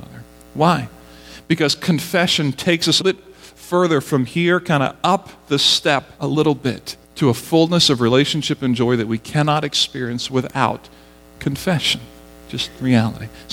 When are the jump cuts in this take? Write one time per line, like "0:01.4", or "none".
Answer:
0:03.0
0:06.2
0:07.0